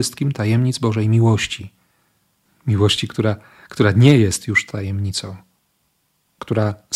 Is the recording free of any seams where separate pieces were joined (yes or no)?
yes